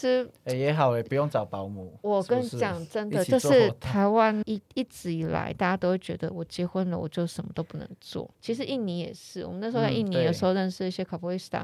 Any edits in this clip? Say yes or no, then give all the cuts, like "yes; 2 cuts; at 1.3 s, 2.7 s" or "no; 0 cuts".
yes; 2 cuts; at 4.4 s, 8.3 s